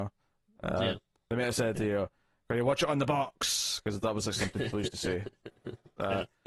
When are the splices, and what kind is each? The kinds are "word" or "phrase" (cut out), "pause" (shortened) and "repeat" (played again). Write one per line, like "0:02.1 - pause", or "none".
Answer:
none